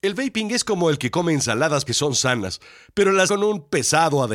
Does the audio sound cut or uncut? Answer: cut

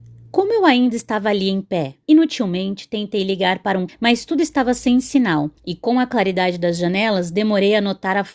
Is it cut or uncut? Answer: cut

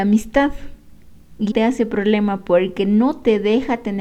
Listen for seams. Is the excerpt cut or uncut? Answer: cut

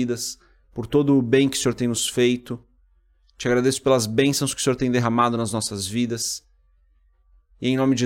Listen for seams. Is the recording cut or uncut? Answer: uncut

